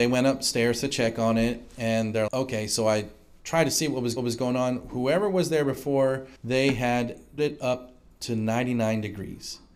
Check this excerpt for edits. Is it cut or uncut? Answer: cut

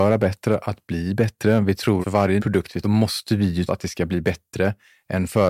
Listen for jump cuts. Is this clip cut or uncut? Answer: cut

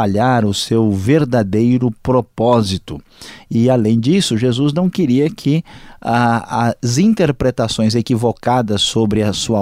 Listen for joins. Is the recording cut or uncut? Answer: uncut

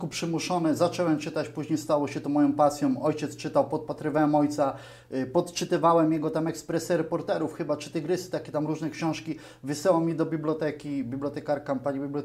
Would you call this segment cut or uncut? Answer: uncut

